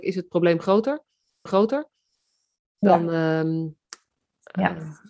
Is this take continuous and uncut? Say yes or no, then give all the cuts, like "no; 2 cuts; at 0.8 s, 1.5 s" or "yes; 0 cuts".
no; 1 cut; at 1.5 s